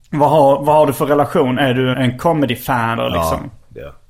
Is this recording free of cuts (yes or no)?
no